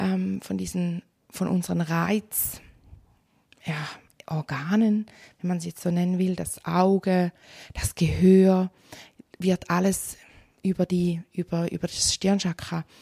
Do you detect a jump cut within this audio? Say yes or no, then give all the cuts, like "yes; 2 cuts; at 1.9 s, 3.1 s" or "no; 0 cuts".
no; 0 cuts